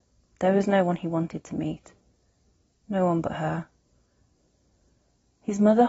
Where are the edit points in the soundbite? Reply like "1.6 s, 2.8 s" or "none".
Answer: none